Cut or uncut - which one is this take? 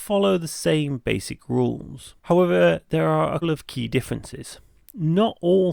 cut